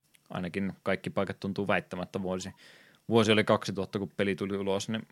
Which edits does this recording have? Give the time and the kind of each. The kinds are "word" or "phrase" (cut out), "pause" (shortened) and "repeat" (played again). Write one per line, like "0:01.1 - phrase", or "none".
none